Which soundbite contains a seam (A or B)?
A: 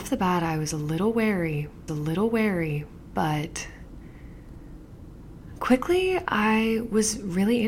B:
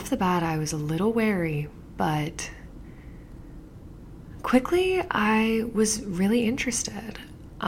A